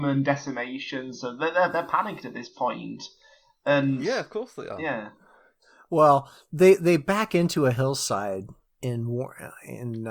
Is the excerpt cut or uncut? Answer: uncut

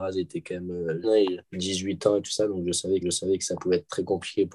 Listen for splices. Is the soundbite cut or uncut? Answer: cut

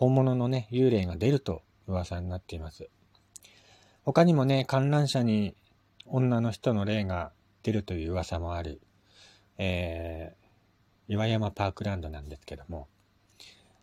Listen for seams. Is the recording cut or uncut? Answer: uncut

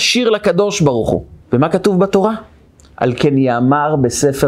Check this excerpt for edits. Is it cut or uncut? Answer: cut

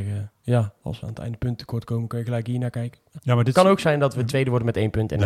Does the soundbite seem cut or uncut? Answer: cut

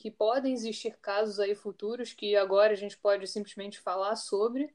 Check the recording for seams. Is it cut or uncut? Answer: uncut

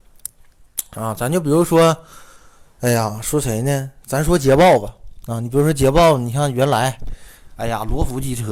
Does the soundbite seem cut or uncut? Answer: uncut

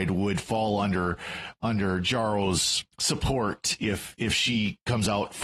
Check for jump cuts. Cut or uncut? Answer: cut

